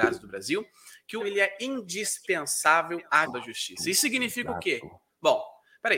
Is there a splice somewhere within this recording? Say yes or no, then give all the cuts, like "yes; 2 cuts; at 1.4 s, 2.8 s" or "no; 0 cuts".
yes; 2 cuts; at 1.2 s, 3.2 s